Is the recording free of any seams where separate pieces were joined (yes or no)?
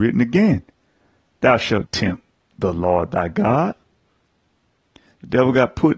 no